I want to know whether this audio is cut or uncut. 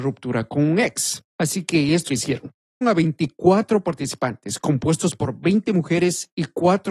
cut